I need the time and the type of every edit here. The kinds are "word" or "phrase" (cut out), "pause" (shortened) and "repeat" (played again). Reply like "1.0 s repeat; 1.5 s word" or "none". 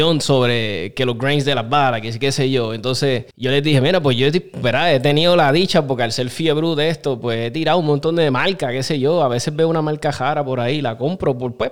3.3 s pause